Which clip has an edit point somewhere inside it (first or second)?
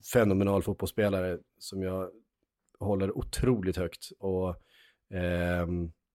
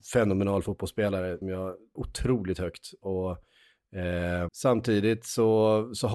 second